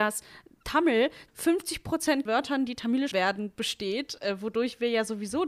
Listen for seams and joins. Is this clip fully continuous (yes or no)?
no